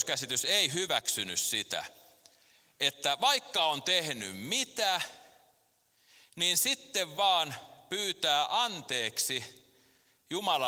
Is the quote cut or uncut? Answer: uncut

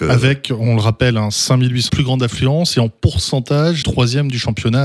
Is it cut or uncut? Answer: cut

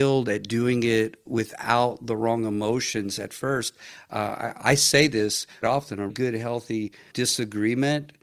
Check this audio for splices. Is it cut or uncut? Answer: cut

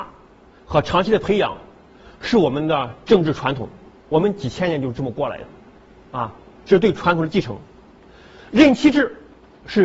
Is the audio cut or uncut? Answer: uncut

